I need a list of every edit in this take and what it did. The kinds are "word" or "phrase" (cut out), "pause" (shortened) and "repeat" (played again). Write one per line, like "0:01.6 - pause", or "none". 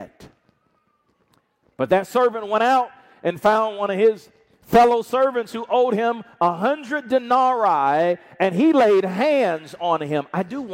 none